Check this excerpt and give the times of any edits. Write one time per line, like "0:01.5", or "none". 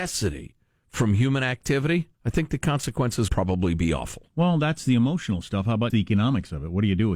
0:02.1
0:03.3
0:05.9

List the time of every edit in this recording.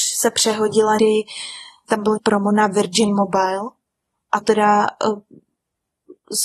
0:01.0
0:01.8
0:02.2
0:04.4

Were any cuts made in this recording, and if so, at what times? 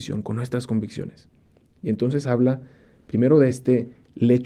none

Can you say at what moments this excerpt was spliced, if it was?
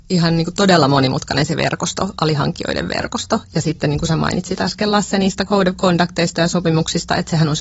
none

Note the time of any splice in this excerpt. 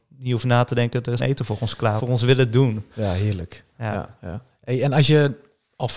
0:01.2
0:02.0

